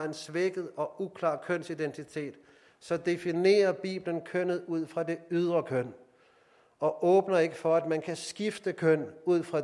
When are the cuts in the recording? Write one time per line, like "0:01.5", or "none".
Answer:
none